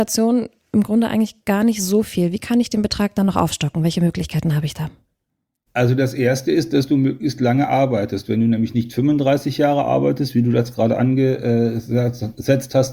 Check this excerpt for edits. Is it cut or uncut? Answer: uncut